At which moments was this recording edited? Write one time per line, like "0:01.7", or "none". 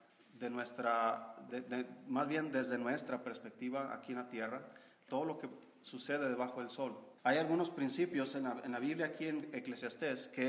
0:07.2

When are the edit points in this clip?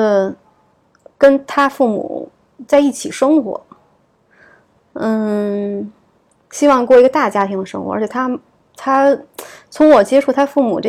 none

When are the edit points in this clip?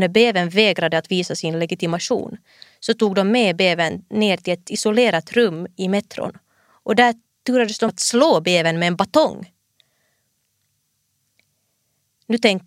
0:07.9

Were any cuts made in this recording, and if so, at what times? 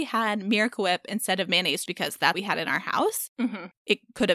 0:01.9
0:02.3

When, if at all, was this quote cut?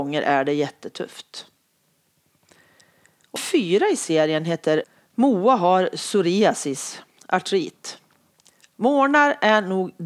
0:03.4

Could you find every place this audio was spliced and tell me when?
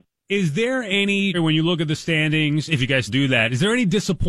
0:01.3
0:03.1

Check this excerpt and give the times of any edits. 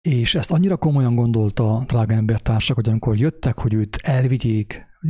none

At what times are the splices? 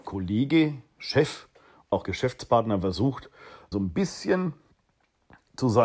0:01.9
0:03.7

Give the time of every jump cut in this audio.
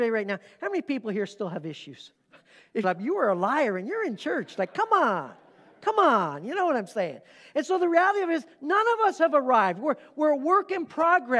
0:02.1
0:02.8

